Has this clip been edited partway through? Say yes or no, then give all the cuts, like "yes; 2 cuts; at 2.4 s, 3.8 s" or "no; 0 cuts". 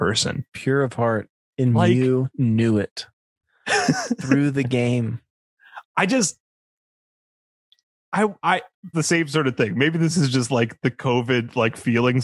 yes; 1 cut; at 8.9 s